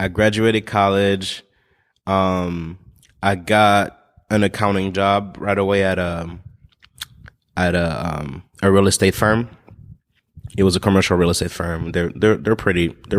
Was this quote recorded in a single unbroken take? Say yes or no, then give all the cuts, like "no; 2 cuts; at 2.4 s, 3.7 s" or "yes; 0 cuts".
yes; 0 cuts